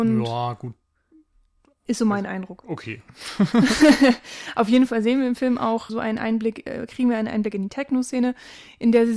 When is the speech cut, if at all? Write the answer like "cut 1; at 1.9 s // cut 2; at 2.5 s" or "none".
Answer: cut 1; at 5.9 s